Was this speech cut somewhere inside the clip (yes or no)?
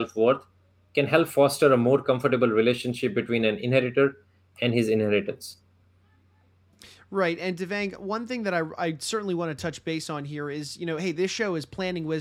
no